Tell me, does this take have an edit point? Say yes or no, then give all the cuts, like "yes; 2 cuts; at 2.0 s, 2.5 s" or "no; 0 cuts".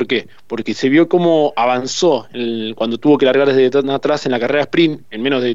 no; 0 cuts